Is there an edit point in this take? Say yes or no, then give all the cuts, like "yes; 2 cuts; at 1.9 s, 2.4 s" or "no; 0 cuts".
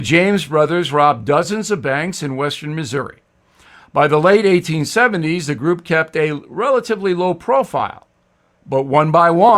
no; 0 cuts